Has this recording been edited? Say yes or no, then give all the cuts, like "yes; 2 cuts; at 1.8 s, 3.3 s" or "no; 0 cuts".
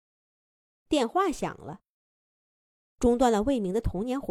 no; 0 cuts